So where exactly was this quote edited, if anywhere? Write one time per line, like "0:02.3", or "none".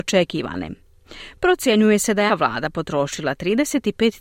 0:02.3